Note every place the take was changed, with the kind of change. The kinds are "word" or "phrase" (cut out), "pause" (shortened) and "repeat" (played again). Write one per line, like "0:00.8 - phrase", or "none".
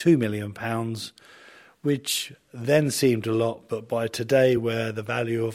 none